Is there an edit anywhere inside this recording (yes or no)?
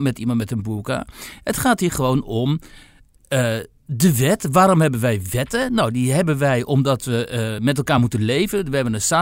no